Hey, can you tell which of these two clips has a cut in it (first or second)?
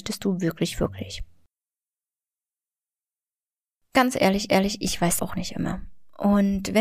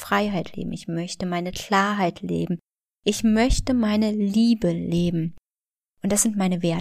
first